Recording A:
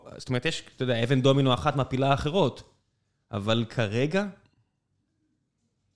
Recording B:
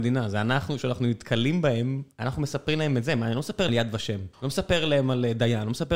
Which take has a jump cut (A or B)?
B